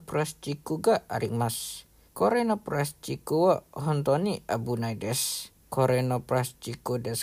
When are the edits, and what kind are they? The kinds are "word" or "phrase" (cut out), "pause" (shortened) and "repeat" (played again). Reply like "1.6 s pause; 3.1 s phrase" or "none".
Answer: 2.1 s pause; 5.6 s pause